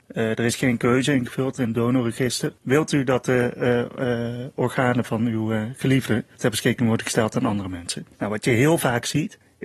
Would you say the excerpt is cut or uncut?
cut